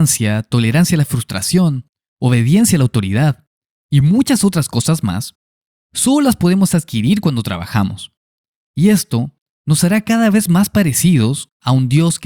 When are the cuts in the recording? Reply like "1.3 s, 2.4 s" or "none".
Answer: none

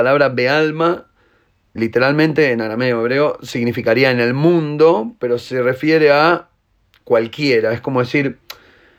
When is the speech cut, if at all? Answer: 1.8 s

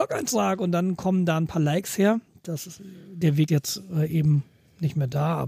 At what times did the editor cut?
3.5 s

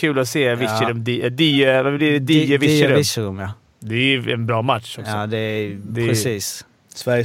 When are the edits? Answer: none

